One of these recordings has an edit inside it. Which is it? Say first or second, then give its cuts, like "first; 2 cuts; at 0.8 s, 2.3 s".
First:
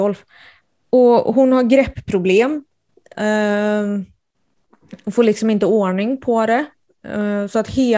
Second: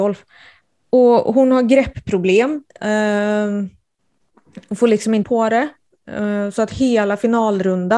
second; 2 cuts; at 2.7 s, 5.2 s